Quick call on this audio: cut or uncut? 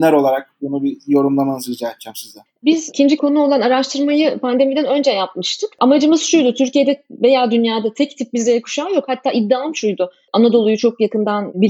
cut